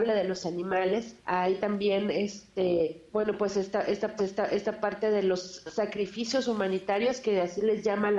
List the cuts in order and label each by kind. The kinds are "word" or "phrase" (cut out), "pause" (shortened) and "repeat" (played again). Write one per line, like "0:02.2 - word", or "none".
0:01.2 - pause
0:03.1 - pause
0:04.2 - repeat